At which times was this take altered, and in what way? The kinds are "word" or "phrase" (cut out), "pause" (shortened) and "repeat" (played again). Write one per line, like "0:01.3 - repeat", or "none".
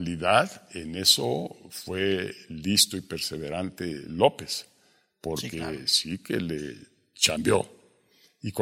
none